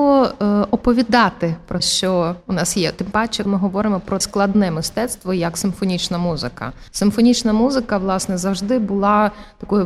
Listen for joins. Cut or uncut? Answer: cut